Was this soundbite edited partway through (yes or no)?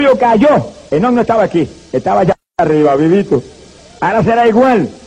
no